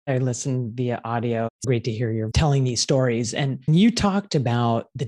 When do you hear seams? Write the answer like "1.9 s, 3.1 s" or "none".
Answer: 1.6 s, 2.3 s, 3.7 s